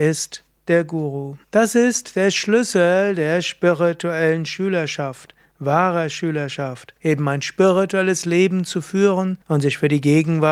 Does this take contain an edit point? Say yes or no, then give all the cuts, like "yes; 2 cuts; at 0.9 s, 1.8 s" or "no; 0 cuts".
yes; 3 cuts; at 1.4 s, 7.0 s, 9.4 s